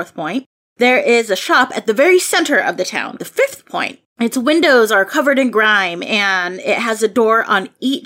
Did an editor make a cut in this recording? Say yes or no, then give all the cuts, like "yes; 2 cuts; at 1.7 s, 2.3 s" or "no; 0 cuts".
yes; 2 cuts; at 3.2 s, 4.1 s